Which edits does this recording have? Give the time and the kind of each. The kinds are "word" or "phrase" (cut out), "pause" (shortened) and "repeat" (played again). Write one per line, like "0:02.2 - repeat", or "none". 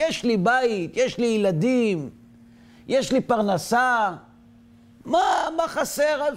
none